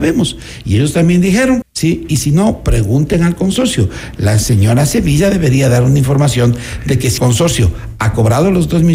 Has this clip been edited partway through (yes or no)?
yes